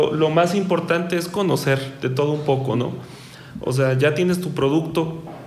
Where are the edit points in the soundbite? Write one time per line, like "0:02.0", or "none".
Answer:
none